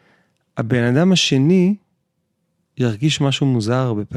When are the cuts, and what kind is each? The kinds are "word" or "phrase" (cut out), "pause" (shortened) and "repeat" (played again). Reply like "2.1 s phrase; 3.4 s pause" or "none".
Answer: none